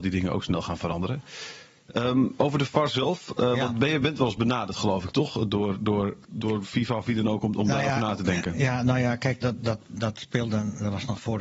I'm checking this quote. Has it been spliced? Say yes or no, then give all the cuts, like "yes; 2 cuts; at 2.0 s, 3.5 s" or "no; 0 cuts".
yes; 3 cuts; at 4.0 s, 6.2 s, 9.4 s